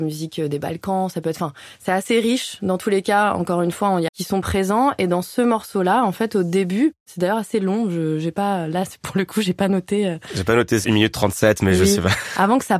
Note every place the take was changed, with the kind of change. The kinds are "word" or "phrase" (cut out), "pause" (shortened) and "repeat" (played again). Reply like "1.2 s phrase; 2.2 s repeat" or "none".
4.1 s phrase; 10.8 s word